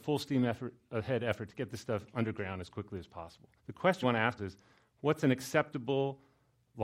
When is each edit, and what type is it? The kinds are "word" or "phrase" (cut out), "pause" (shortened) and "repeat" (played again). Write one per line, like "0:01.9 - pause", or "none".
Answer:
0:03.6 - pause
0:04.0 - word
0:04.4 - word

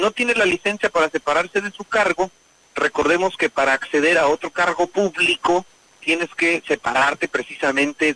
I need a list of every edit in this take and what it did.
none

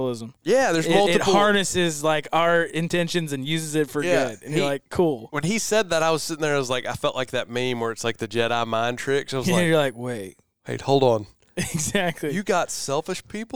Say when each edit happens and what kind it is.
none

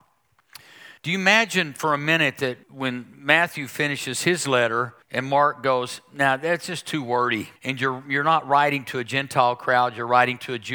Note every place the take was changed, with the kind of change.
0:01.0 - pause
0:02.6 - pause
0:05.0 - pause
0:07.6 - pause

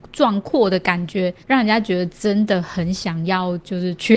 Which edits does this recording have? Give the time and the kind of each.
0:01.4 - pause

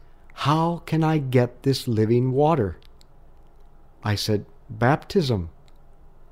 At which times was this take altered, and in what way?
none

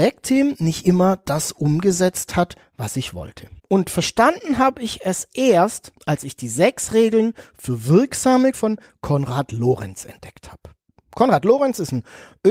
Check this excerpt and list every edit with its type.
0:03.6 - pause
0:06.0 - pause
0:08.5 - word

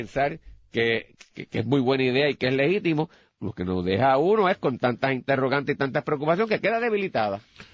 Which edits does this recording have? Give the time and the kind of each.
0:03.4 - word

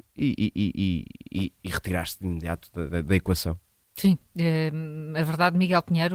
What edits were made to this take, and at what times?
none

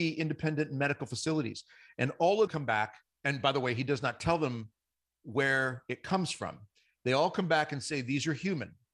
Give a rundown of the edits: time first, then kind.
0:02.5 - word

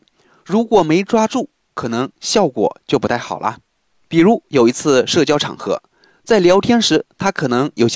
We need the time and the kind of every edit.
none

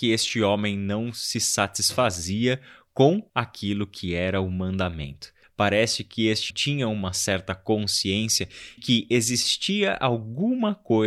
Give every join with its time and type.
0:03.3 - pause
0:05.4 - pause
0:06.5 - word
0:08.8 - word

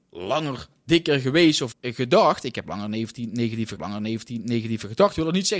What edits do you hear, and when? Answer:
0:01.7 - word
0:03.8 - repeat

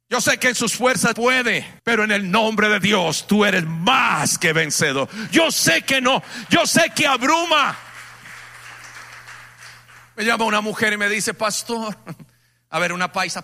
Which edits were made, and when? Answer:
0:01.1 - word
0:01.8 - pause

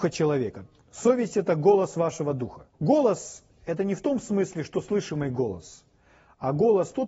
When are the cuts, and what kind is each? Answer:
0:02.7 - pause

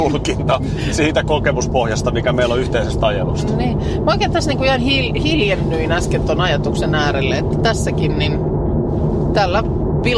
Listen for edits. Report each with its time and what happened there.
none

